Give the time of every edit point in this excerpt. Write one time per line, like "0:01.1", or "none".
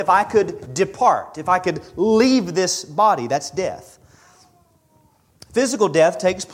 none